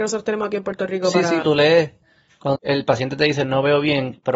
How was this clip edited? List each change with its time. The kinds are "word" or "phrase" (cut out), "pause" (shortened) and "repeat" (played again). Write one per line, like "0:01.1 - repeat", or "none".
0:01.4 - word
0:02.6 - word